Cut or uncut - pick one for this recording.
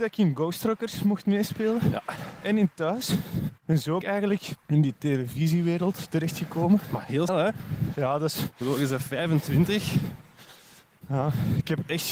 cut